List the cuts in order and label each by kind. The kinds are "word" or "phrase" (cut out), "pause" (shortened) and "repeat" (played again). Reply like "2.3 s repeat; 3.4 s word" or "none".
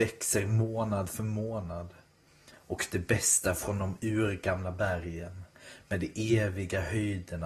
none